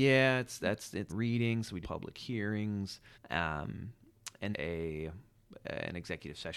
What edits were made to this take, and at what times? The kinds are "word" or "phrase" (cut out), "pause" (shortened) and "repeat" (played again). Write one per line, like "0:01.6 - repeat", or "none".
0:01.1 - word
0:01.8 - phrase
0:03.1 - pause
0:04.5 - word